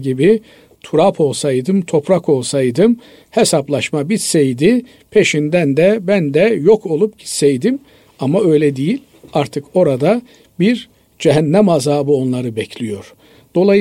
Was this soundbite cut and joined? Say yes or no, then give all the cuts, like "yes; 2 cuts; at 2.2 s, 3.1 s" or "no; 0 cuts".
no; 0 cuts